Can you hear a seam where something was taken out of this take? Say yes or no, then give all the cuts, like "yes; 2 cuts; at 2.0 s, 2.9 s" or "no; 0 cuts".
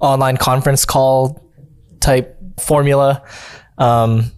yes; 1 cut; at 2.6 s